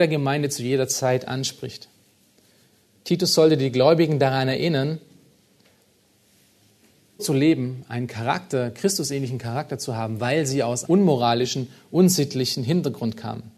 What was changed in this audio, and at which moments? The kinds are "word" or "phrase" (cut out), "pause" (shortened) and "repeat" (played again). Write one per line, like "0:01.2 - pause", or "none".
0:07.2 - word
0:10.8 - word